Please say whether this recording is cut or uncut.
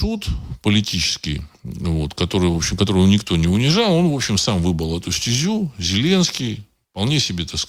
uncut